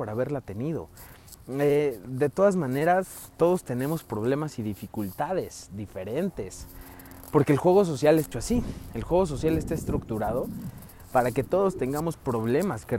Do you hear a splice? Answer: yes; 1 cut; at 8.3 s

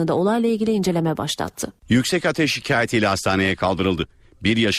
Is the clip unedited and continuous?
no; 1 cut; at 1.8 s

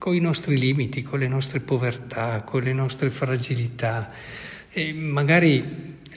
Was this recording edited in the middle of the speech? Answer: no; 0 cuts

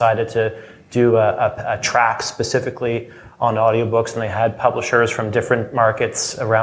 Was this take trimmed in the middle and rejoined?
no; 0 cuts

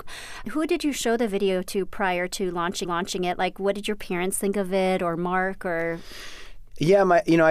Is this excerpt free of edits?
no; 1 cut; at 2.8 s

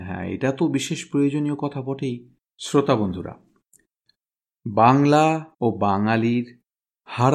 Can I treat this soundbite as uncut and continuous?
no; 2 cuts; at 2.4 s, 5.5 s

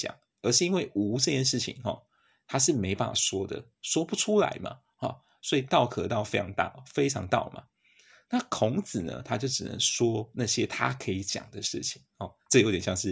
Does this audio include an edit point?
no; 0 cuts

